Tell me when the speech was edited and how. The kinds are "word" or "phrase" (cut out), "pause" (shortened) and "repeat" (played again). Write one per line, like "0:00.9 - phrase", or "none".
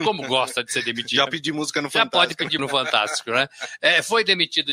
0:01.3 - word
0:02.6 - word